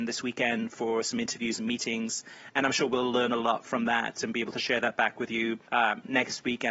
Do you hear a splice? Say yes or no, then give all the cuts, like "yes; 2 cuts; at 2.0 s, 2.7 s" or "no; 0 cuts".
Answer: yes; 1 cut; at 5.7 s